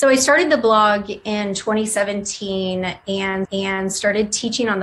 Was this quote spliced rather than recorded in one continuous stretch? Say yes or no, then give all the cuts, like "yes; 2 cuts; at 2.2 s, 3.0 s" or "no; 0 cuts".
yes; 1 cut; at 3.4 s